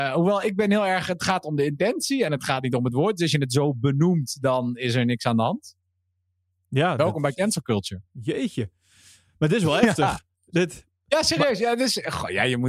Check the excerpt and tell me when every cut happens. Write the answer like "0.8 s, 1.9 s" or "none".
none